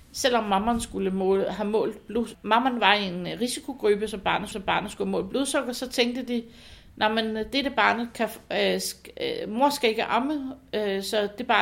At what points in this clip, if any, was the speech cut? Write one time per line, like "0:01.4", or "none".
0:02.3
0:04.5